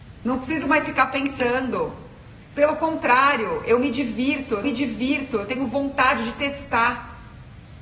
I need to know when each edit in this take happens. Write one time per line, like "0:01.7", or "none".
0:04.6